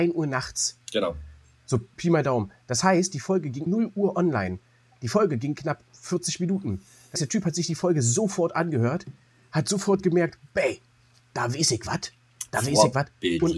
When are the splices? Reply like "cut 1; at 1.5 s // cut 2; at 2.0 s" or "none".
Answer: cut 1; at 3.7 s // cut 2; at 7.2 s